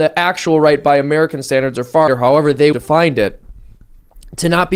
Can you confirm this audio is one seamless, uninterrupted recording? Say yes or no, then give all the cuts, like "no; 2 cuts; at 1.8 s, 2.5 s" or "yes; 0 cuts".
no; 2 cuts; at 2.1 s, 2.7 s